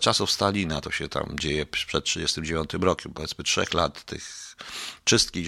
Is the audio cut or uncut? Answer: uncut